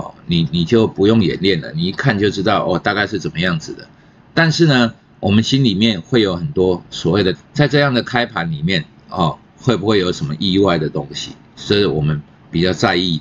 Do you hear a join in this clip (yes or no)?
yes